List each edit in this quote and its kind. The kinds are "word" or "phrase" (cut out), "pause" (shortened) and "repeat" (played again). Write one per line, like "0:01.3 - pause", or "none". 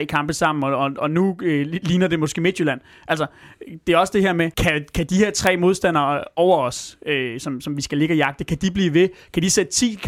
0:04.5 - pause